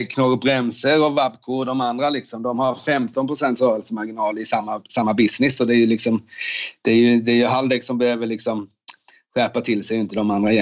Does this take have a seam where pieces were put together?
no; 0 cuts

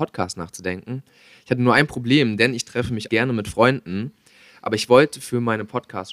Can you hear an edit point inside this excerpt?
yes; 1 cut; at 3.1 s

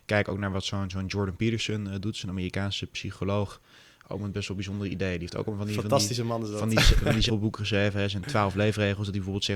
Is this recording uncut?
no; 1 cut; at 7.3 s

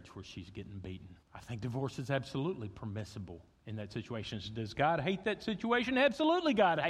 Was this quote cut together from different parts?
yes; 2 cuts; at 1.2 s, 3.6 s

